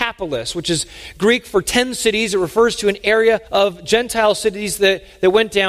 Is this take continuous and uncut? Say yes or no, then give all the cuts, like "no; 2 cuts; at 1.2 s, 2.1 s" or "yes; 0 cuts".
no; 1 cut; at 3.5 s